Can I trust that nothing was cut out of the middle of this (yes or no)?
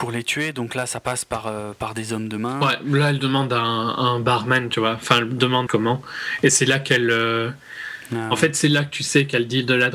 no